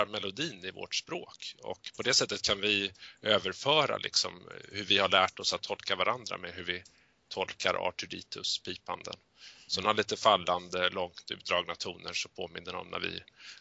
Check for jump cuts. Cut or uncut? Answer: cut